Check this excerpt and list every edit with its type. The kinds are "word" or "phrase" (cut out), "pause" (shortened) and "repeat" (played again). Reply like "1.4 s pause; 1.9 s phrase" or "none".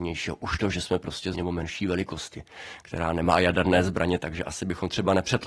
1.3 s phrase